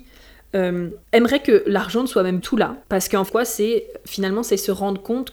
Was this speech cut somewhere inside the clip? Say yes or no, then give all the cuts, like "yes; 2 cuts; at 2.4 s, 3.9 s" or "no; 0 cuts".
yes; 4 cuts; at 1.0 s, 2.4 s, 2.8 s, 3.3 s